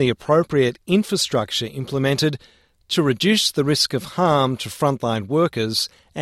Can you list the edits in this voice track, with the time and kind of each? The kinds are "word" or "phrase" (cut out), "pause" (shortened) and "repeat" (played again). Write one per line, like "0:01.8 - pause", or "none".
none

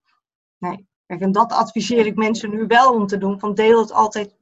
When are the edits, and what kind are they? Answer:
0:01.0 - pause

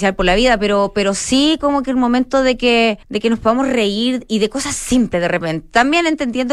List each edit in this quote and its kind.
0:03.0 - pause

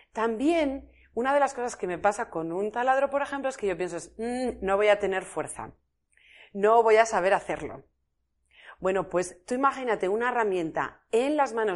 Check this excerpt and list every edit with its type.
none

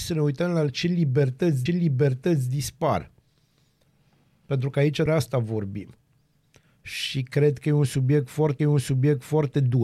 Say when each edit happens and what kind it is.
0:01.7 - repeat
0:05.1 - word
0:08.6 - repeat

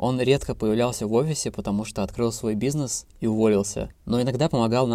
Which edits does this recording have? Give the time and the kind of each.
0:03.1 - pause

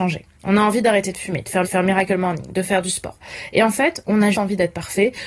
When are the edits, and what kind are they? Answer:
0:01.6 - repeat
0:04.3 - word

